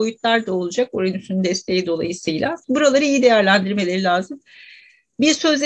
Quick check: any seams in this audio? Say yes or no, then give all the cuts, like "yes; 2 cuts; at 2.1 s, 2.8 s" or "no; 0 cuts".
yes; 1 cut; at 2.6 s